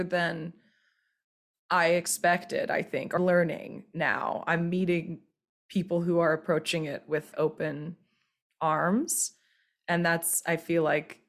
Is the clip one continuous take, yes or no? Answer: no